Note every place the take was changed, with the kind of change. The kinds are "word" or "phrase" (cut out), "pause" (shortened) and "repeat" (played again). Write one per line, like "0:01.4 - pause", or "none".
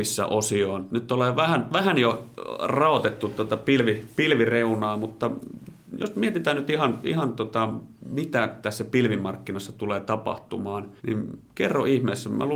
0:11.0 - pause